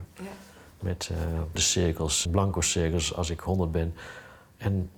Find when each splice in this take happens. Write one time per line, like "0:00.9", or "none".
0:01.6
0:02.3